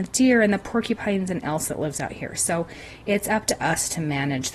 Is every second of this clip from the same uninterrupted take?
no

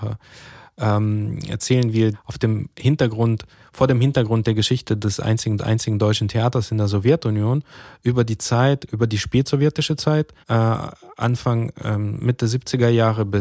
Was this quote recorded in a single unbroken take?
no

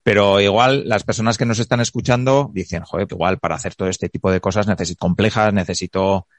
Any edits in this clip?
yes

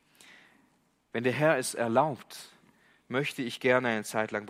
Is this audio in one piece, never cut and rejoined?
yes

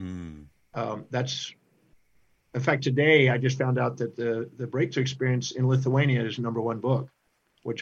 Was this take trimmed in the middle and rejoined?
no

